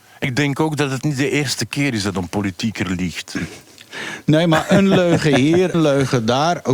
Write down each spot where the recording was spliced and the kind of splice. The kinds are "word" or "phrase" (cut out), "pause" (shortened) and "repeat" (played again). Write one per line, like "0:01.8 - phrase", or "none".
0:05.7 - word

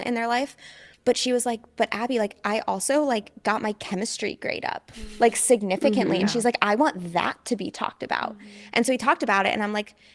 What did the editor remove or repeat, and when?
0:00.9 - pause

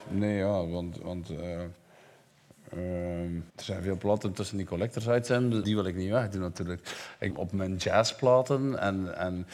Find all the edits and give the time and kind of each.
0:03.5 - pause
0:05.6 - word
0:07.3 - phrase

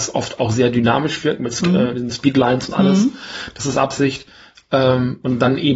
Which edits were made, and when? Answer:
none

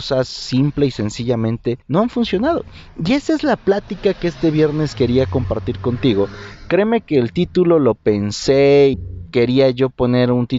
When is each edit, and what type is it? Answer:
0:01.8 - pause
0:08.9 - word

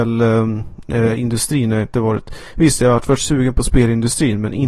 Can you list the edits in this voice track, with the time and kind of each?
none

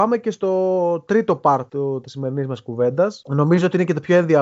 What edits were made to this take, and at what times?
none

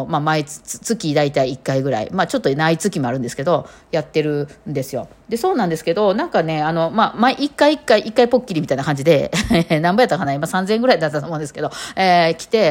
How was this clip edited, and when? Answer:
none

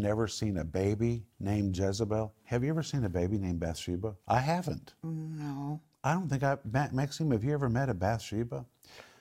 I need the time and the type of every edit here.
0:01.3 - pause
0:04.2 - pause

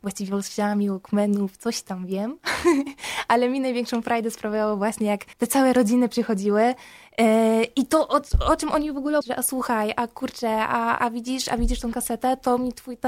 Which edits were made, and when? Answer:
0:05.3 - pause
0:08.3 - pause
0:09.2 - word
0:11.0 - word

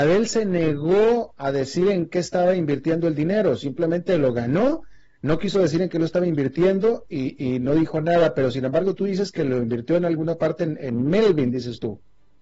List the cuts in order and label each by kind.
0:10.8 - word

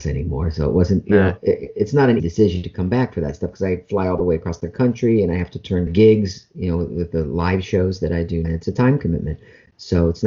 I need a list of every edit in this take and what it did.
0:02.2 - word
0:05.9 - phrase
0:08.4 - phrase

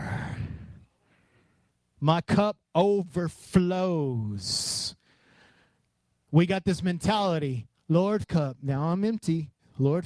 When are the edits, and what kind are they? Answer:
0:08.2 - phrase

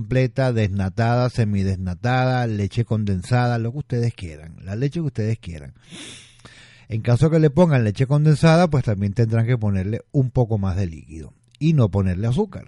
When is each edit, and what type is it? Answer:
none

